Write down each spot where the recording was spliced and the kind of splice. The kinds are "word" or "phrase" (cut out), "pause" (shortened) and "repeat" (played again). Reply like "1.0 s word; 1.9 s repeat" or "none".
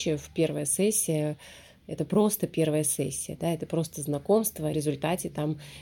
4.7 s phrase